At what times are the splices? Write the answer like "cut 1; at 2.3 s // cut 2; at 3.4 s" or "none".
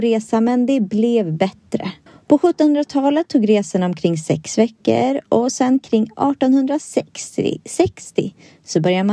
cut 1; at 2.1 s

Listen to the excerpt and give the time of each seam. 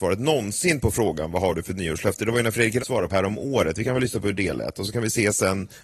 cut 1; at 2.8 s // cut 2; at 3.1 s

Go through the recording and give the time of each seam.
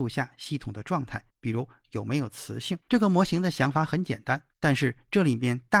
cut 1; at 1.3 s // cut 2; at 2.8 s // cut 3; at 4.5 s

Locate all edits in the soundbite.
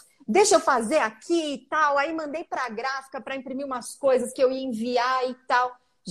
none

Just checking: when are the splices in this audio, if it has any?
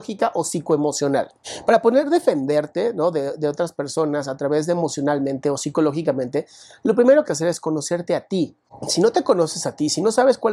cut 1; at 7.2 s

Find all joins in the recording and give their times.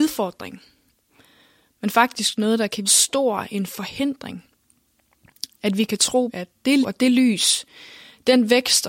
cut 1; at 2.8 s // cut 2; at 6.3 s // cut 3; at 6.8 s

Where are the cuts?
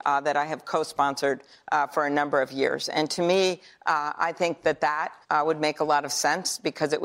cut 1; at 5.2 s

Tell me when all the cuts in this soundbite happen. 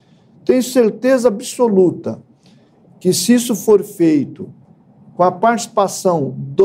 none

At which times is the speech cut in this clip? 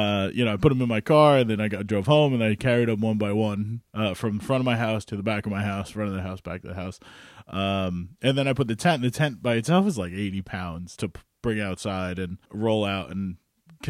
cut 1; at 3.9 s // cut 2; at 11.0 s // cut 3; at 12.4 s

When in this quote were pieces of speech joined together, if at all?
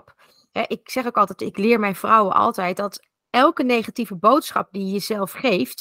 none

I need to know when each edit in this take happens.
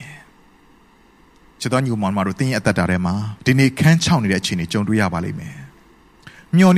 cut 1; at 3.4 s

